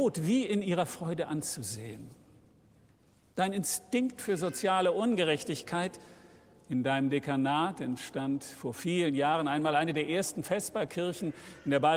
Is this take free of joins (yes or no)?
yes